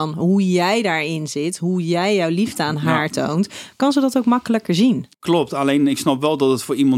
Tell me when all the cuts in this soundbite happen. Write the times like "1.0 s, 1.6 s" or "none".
5.1 s

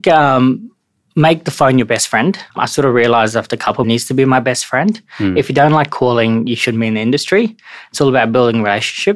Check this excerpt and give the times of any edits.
2.5 s, 3.8 s

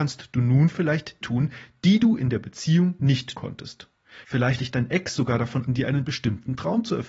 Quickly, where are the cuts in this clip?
1.2 s, 3.3 s, 4.6 s, 5.7 s

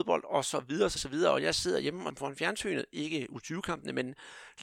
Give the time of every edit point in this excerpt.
1.0 s, 2.1 s

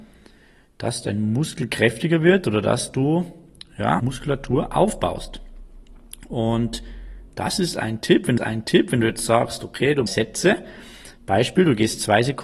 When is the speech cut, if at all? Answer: 4.0 s, 8.4 s, 10.1 s

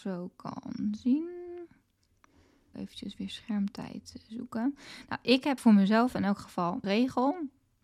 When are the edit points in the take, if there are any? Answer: 2.7 s, 5.6 s, 6.8 s

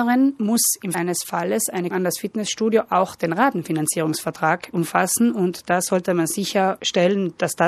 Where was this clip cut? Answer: 0.9 s, 1.9 s

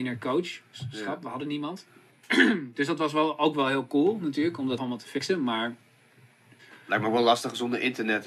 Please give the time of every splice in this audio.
4.8 s

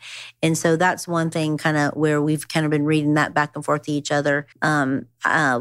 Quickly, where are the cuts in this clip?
4.5 s

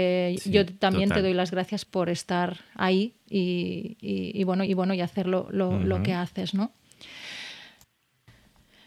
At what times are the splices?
1.8 s, 3.2 s, 4.7 s

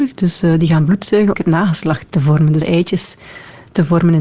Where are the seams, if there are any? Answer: 1.3 s, 2.6 s

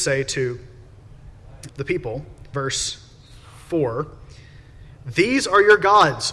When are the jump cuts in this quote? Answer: 1.7 s, 2.5 s

